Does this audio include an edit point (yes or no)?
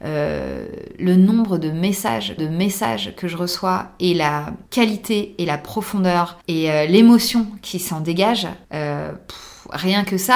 yes